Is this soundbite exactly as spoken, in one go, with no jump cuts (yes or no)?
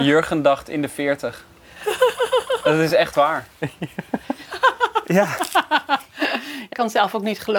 yes